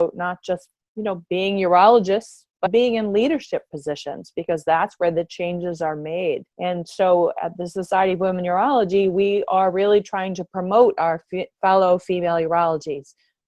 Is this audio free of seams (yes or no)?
no